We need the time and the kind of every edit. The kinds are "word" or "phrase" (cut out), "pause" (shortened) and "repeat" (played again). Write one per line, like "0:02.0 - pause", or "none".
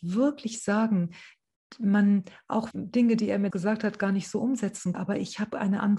0:02.7 - phrase
0:03.5 - word
0:04.9 - word